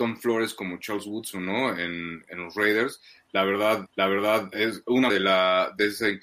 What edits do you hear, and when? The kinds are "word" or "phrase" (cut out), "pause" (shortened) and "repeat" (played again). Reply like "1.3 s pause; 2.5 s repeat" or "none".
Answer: 3.9 s repeat; 5.1 s word